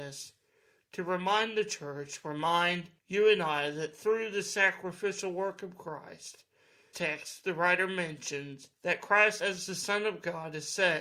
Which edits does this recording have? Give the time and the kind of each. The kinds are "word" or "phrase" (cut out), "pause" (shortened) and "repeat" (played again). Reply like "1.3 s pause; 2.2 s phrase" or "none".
3.0 s pause; 6.9 s phrase; 8.7 s pause